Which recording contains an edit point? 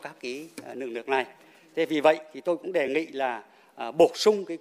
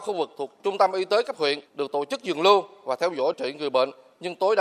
second; 2 cuts; at 1.7 s, 3.3 s

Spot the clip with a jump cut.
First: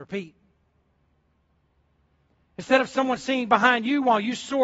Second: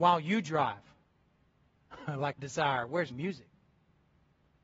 second; 2 cuts; at 2.4 s, 3.1 s

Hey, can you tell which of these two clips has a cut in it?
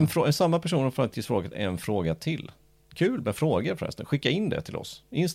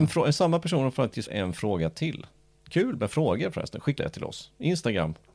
second; 2 cuts; at 1.3 s, 4.0 s

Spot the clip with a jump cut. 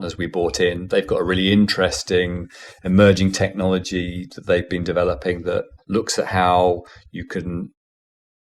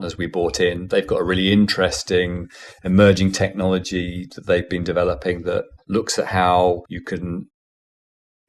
second; 1 cut; at 6.9 s

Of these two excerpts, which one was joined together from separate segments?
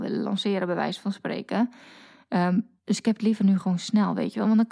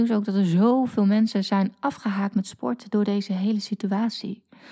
first; 1 cut; at 2.8 s

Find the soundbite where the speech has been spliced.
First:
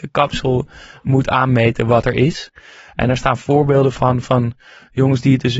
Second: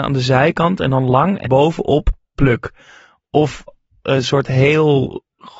second; 2 cuts; at 1.4 s, 2.4 s

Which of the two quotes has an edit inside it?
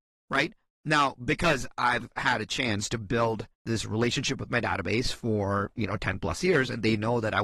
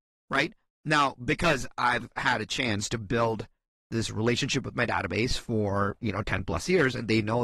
first; 1 cut; at 3.5 s

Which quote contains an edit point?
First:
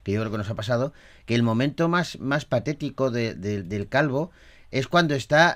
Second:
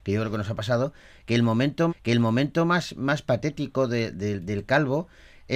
second; 1 cut; at 1.9 s

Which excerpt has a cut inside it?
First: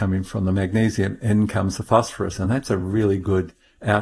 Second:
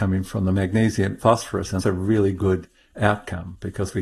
second; 2 cuts; at 1.2 s, 1.8 s

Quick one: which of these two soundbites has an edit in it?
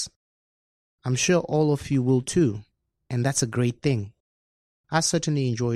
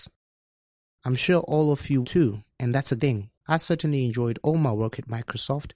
second; 4 cuts; at 2.0 s, 2.5 s, 3.0 s, 3.4 s

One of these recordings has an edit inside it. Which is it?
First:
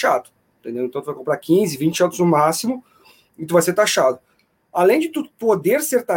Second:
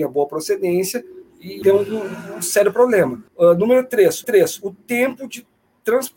second; 3 cuts; at 1.6 s, 3.3 s, 4.2 s

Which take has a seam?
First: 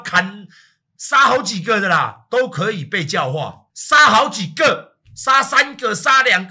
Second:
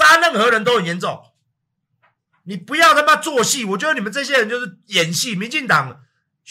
first; 1 cut; at 3.7 s

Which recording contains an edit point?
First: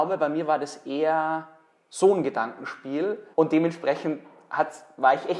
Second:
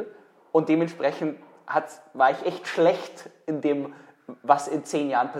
first; 1 cut; at 3.3 s

